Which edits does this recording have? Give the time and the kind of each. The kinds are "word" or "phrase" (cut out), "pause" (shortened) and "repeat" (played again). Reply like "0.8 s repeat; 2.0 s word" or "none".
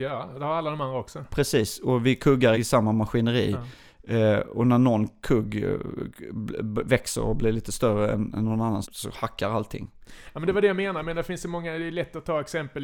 2.5 s word; 8.8 s word